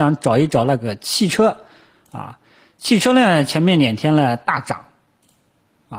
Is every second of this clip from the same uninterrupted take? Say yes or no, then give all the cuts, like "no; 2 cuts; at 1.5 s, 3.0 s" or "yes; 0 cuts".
yes; 0 cuts